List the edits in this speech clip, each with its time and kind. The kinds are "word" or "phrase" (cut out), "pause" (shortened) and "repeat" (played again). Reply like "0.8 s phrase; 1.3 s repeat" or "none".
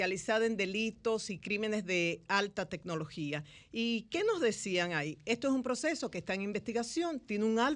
none